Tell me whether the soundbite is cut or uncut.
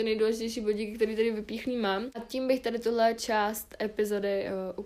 uncut